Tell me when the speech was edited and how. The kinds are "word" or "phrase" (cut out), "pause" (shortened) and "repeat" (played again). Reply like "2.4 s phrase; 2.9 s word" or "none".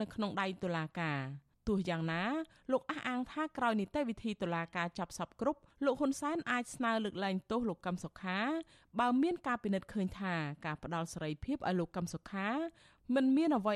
none